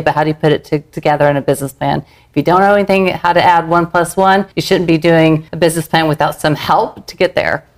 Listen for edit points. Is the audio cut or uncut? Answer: cut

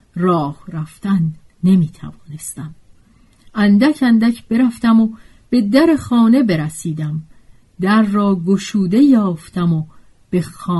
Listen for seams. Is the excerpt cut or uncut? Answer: uncut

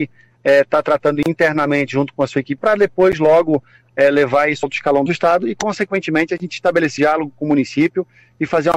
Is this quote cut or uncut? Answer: cut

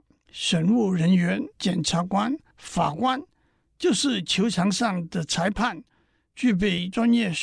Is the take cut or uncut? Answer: cut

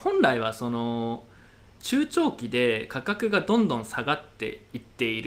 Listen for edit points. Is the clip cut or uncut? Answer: uncut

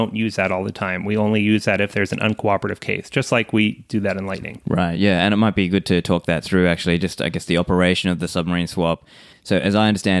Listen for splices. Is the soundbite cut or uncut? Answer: uncut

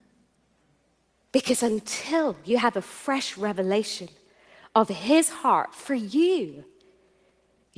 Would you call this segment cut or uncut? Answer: uncut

